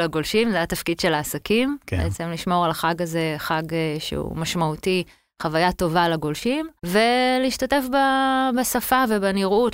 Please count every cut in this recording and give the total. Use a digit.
1